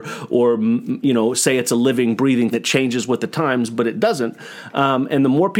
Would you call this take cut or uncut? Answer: cut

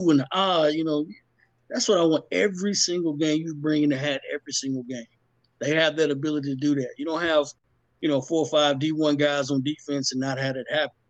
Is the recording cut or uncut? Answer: uncut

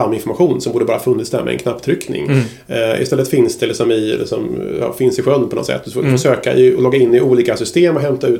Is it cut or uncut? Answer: uncut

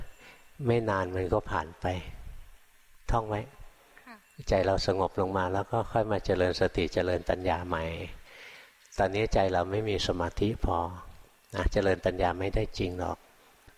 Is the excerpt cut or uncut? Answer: uncut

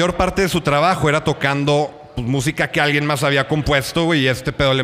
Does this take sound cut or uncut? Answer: uncut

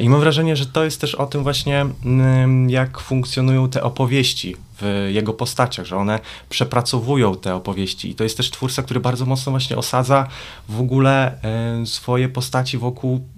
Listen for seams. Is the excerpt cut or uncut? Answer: uncut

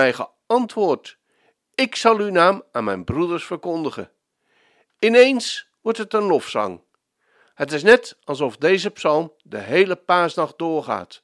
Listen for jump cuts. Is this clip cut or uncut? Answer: uncut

